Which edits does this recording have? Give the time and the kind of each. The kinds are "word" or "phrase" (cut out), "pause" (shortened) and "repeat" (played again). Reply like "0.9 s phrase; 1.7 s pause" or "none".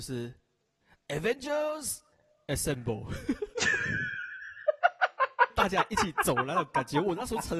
2.1 s pause